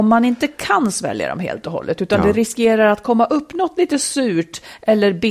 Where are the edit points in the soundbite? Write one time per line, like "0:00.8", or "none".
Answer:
none